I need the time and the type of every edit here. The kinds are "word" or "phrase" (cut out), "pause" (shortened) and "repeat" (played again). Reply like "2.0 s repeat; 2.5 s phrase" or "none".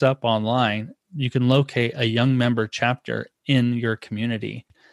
1.0 s pause